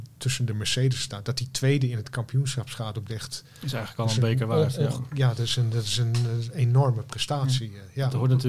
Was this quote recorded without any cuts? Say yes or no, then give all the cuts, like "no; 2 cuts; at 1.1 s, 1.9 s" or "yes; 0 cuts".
no; 1 cut; at 3.1 s